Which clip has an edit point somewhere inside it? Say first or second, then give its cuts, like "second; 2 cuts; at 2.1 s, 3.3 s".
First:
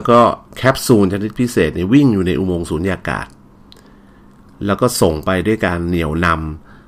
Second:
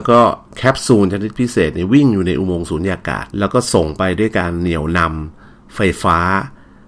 second; 1 cut; at 3.3 s